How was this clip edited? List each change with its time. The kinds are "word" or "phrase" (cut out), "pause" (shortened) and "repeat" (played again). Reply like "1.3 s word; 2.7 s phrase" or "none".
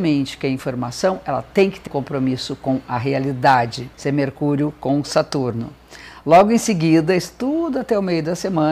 1.9 s word; 3.9 s pause